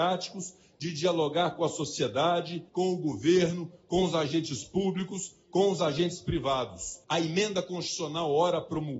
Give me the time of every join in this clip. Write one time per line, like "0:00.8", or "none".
0:02.7
0:07.0

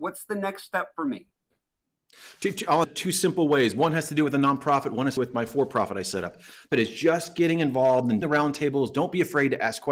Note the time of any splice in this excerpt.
0:02.8
0:05.2
0:06.7
0:08.2

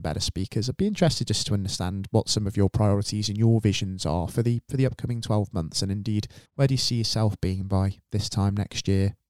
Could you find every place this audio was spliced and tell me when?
0:06.5

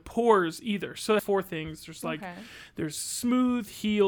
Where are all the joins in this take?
0:01.2

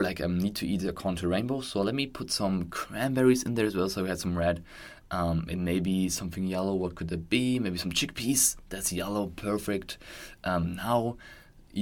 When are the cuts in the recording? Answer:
none

